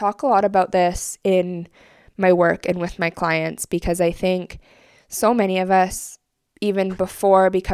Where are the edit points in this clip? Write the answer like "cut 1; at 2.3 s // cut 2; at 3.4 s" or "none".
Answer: none